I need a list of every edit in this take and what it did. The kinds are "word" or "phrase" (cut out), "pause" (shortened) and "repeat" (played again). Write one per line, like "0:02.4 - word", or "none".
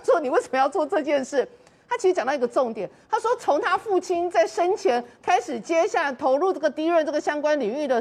none